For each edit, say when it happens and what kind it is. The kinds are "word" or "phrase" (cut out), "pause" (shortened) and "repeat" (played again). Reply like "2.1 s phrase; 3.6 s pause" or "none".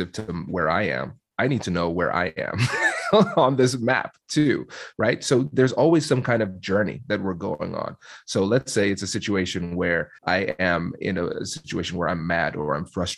10.2 s pause